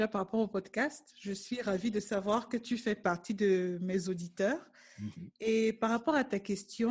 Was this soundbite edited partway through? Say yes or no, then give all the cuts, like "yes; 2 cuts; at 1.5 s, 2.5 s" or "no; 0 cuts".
no; 0 cuts